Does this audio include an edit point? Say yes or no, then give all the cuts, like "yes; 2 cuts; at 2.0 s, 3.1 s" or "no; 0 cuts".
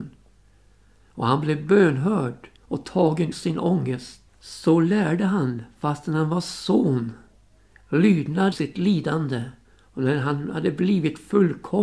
yes; 5 cuts; at 2.6 s, 3.3 s, 4.3 s, 8.5 s, 9.6 s